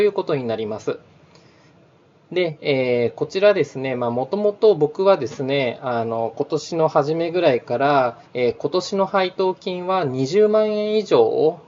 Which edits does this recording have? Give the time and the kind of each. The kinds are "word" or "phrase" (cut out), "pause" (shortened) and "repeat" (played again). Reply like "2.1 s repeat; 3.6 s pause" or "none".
8.3 s pause